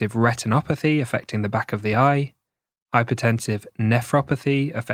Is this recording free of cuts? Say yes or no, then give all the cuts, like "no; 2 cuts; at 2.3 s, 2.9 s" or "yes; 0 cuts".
yes; 0 cuts